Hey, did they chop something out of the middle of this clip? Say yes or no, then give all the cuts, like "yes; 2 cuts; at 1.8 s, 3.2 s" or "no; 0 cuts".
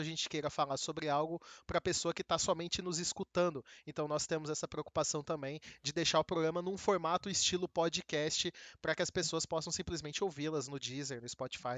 no; 0 cuts